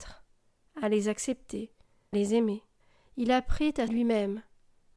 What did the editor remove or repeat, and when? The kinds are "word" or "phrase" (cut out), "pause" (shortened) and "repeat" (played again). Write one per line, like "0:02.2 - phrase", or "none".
0:02.1 - word
0:02.8 - pause
0:03.9 - word